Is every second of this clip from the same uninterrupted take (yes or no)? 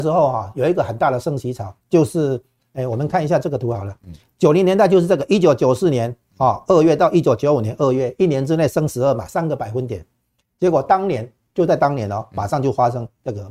no